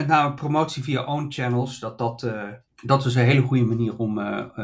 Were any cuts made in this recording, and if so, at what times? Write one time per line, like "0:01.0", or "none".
none